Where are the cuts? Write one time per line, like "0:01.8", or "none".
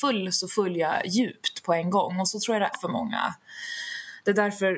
0:02.7